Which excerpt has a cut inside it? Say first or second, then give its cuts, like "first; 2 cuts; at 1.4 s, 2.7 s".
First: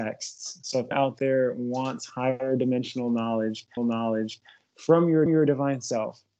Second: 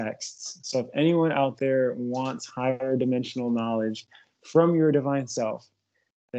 first; 3 cuts; at 0.9 s, 3.8 s, 5.3 s